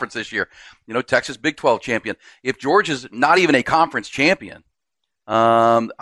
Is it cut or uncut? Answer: uncut